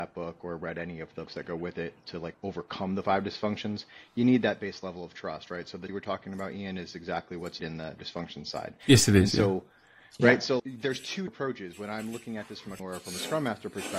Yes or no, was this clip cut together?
yes